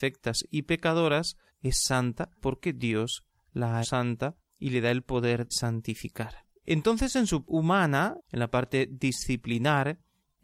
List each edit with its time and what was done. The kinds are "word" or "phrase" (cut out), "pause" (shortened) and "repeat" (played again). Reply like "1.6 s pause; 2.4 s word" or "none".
1.5 s pause; 2.4 s pause; 3.8 s word; 4.5 s pause; 5.5 s word; 6.6 s pause; 7.4 s word; 8.2 s phrase

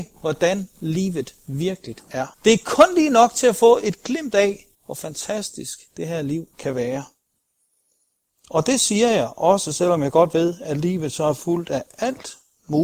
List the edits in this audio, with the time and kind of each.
2.3 s pause; 4.7 s pause; 5.9 s pause; 6.5 s pause

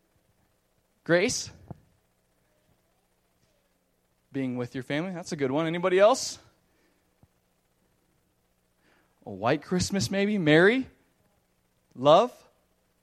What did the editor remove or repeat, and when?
none

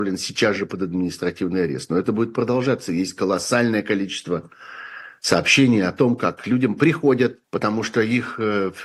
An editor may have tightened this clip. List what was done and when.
7.4 s pause

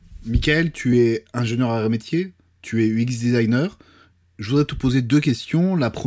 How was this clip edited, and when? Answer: none

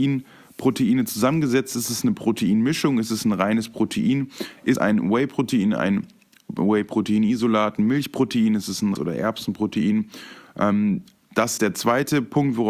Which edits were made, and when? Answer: 4.8 s word; 9.0 s word; 11.6 s word

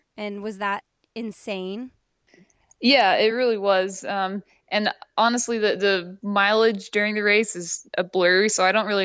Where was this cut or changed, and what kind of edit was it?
none

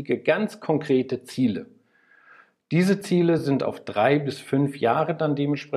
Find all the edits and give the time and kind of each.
none

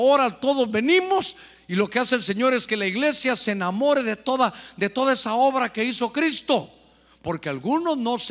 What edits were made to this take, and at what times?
none

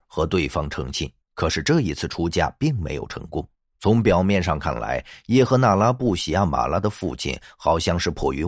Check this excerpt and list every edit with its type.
1.2 s pause; 3.5 s pause

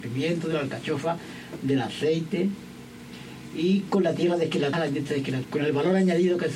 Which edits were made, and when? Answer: 4.7 s word; 5.4 s word

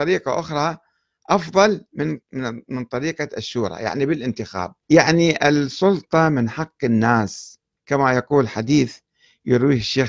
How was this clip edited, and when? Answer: 2.2 s pause; 4.8 s pause; 7.8 s pause

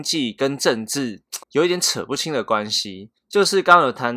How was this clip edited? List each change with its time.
1.4 s pause; 3.2 s pause

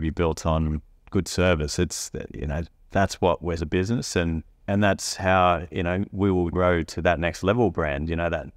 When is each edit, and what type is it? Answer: 3.6 s phrase; 4.5 s pause; 6.5 s word

